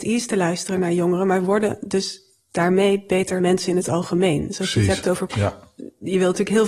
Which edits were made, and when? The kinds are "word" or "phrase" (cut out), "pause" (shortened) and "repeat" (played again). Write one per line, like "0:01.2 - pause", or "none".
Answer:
0:03.4 - word
0:05.3 - word